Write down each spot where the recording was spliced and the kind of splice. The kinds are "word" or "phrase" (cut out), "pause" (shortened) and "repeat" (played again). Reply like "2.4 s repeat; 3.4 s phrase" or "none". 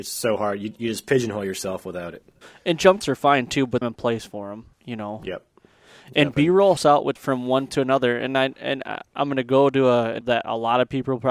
2.4 s pause; 3.0 s word; 3.8 s phrase; 4.7 s pause; 6.8 s word; 7.2 s word; 7.7 s word; 10.2 s word